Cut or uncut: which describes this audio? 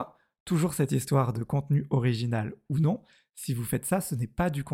uncut